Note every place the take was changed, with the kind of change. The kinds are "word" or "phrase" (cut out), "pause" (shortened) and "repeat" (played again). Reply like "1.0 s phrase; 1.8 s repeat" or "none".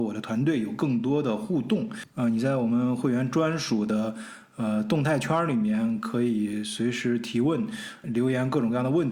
8.0 s word